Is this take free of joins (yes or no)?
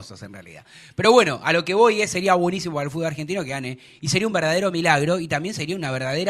yes